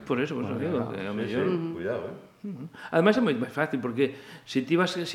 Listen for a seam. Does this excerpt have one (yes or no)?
no